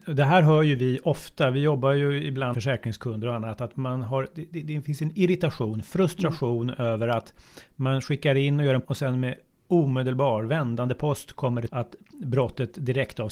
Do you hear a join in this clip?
yes; 4 cuts; at 2.5 s, 3.7 s, 8.8 s, 11.7 s

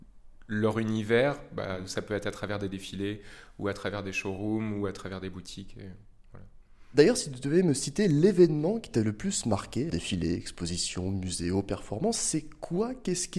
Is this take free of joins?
no; 1 cut; at 9.9 s

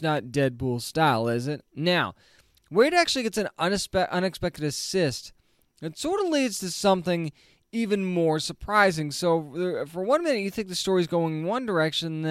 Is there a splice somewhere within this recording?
no; 0 cuts

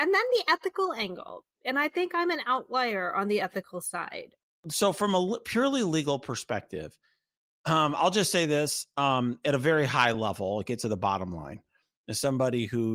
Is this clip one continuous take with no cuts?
yes; 0 cuts

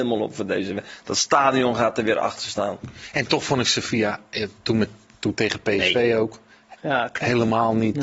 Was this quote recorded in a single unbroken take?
yes; 0 cuts

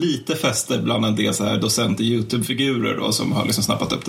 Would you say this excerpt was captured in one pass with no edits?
yes; 0 cuts

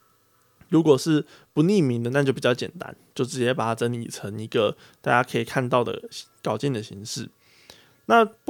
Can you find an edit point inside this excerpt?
no; 0 cuts

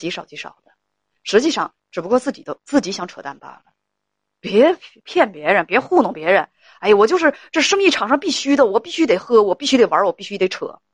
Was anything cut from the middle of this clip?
no; 0 cuts

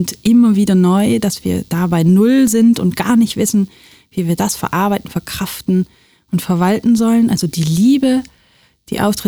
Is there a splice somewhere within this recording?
no; 0 cuts

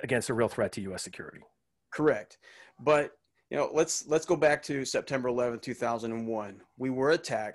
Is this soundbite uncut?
yes; 0 cuts

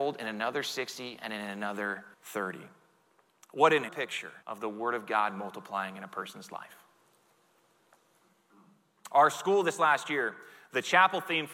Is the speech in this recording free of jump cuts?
no; 3 cuts; at 2.1 s, 3.9 s, 4.4 s

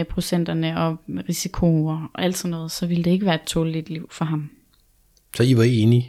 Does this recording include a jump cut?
no; 0 cuts

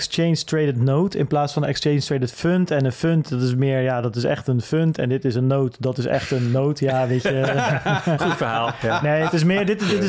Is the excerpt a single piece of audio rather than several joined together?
yes; 0 cuts

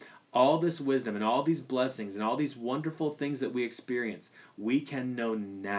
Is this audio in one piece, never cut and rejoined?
yes; 0 cuts

